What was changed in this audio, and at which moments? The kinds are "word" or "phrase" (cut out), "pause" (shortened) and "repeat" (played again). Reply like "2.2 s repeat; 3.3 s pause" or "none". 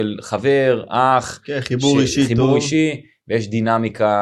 none